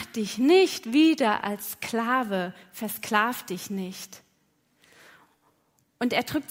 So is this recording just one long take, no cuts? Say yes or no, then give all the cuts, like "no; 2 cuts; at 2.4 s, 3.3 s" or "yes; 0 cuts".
yes; 0 cuts